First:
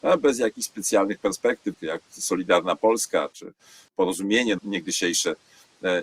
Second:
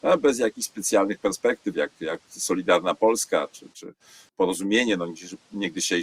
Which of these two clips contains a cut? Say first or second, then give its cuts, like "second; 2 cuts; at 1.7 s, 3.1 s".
first; 3 cuts; at 1.7 s, 3.3 s, 4.6 s